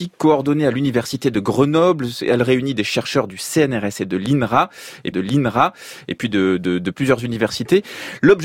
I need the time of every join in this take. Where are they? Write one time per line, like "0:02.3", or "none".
0:05.1
0:06.9